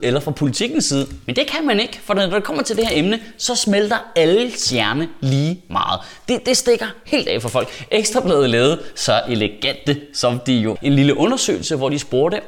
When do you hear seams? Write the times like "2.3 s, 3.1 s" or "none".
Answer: 10.8 s